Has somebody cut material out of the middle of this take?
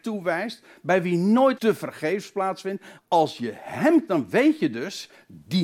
yes; 3 cuts; at 1.6 s, 3.0 s, 4.1 s

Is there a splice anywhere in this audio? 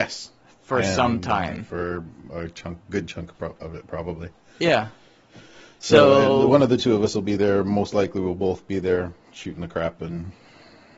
no; 0 cuts

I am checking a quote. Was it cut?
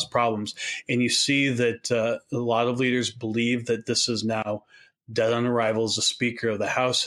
no; 0 cuts

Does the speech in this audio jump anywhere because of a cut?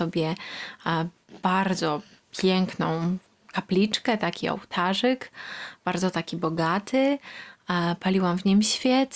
no; 0 cuts

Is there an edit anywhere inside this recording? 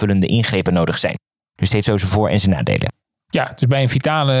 no; 0 cuts

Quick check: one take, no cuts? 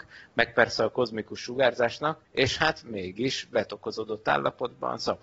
yes; 0 cuts

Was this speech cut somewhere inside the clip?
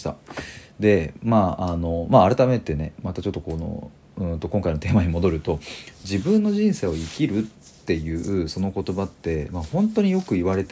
no; 0 cuts

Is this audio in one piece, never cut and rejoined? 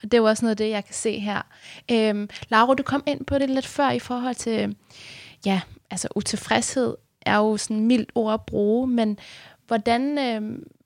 yes; 0 cuts

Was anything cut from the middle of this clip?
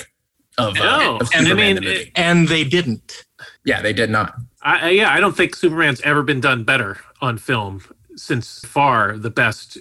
yes; 3 cuts; at 3.6 s, 4.5 s, 8.6 s

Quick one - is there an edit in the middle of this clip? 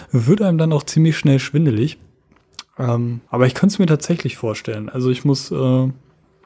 yes; 1 cut; at 3.3 s

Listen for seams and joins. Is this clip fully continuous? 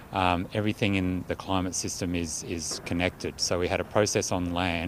no; 1 cut; at 1.3 s

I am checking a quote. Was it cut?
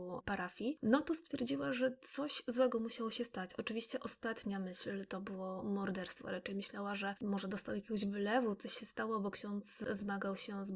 no; 0 cuts

